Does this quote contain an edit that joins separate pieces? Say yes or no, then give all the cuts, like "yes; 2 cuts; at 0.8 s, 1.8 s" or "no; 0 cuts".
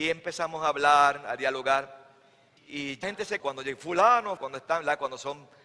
yes; 4 cuts; at 2.6 s, 3.0 s, 3.4 s, 4.4 s